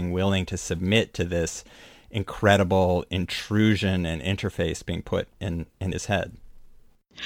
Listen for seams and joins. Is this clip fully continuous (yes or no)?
yes